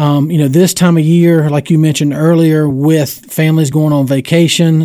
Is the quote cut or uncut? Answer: uncut